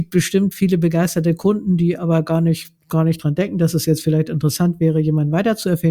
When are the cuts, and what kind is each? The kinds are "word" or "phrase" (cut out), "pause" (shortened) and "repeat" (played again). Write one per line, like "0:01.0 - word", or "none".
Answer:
0:02.8 - pause